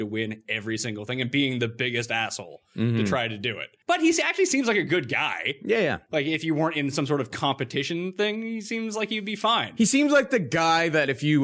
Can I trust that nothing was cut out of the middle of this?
no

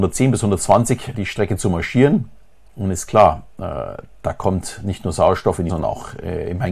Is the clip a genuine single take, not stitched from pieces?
no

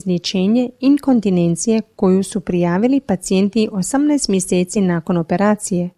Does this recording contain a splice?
no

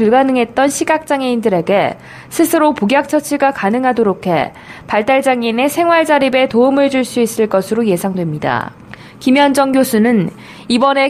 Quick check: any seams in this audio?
no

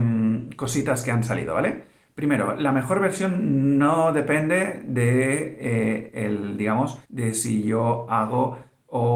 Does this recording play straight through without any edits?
no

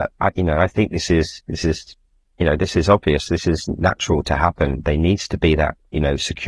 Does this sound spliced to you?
no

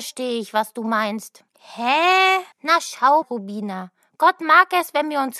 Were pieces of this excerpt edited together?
yes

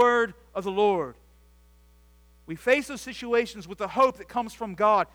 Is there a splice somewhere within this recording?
no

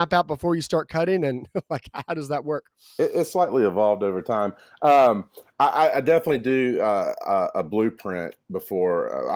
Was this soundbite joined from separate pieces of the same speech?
no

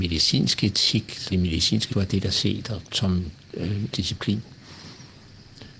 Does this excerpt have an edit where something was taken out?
yes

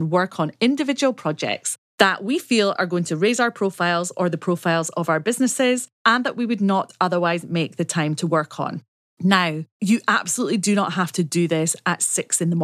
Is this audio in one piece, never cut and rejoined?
yes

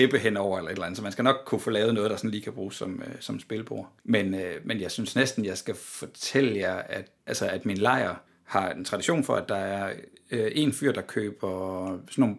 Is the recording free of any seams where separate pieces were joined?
no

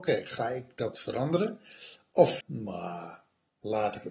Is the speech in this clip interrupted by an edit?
yes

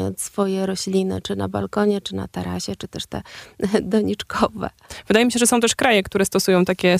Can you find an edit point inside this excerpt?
no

